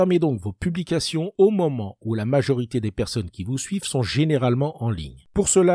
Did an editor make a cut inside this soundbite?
no; 0 cuts

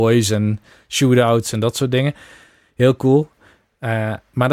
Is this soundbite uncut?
yes; 0 cuts

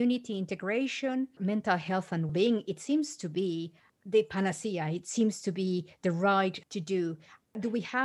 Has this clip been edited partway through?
yes; 3 cuts; at 1.4 s, 2.3 s, 6.6 s

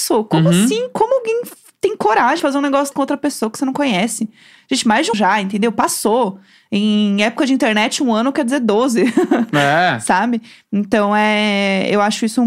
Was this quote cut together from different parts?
yes; 3 cuts; at 2.4 s, 2.9 s, 5.1 s

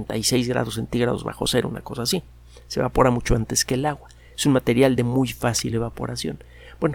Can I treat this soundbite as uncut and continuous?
yes; 0 cuts

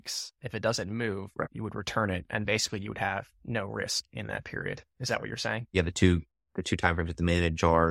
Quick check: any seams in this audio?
no; 0 cuts

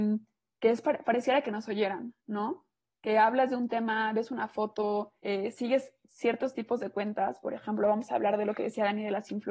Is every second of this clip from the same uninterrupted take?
no; 2 cuts; at 2.2 s, 5.2 s

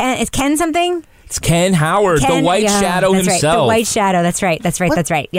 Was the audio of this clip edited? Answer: no; 0 cuts

